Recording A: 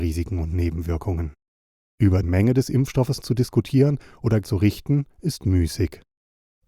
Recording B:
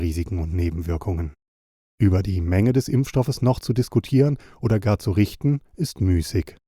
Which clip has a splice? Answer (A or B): A